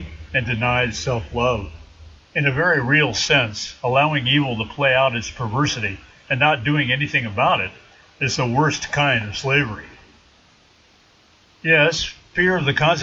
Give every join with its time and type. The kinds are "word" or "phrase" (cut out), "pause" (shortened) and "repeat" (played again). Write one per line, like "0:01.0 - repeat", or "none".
0:02.2 - pause